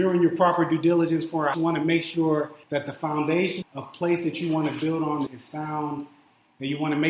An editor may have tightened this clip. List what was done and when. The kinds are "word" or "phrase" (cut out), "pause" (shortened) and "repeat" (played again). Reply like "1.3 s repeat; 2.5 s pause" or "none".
1.5 s word; 2.6 s pause; 3.6 s phrase; 5.3 s word